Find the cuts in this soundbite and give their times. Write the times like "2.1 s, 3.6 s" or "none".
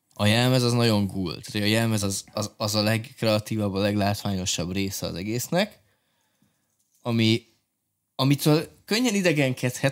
none